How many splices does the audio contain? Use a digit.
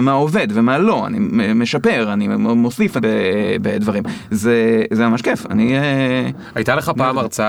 1